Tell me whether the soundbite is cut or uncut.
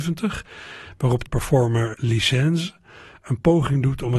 cut